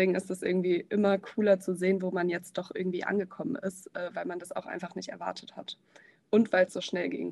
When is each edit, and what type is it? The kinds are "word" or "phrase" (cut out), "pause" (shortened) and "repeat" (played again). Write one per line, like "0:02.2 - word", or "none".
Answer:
none